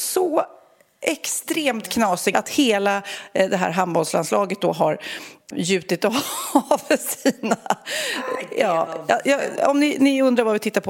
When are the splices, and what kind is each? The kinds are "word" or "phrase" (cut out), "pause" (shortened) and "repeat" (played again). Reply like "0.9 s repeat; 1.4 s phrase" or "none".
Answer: 2.3 s word; 5.5 s word